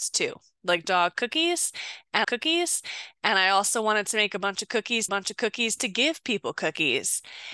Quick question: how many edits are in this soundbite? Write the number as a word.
two